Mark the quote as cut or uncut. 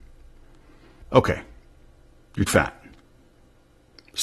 cut